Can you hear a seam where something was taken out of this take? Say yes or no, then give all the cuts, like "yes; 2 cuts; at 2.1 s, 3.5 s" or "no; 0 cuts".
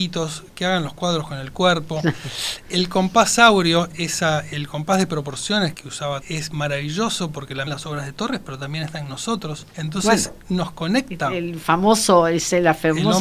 yes; 5 cuts; at 3.9 s, 5.7 s, 6.2 s, 7.7 s, 9.7 s